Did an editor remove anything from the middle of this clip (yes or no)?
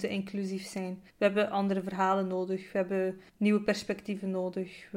yes